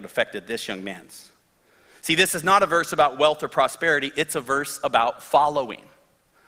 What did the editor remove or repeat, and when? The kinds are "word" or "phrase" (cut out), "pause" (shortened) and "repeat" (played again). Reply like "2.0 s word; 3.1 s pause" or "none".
none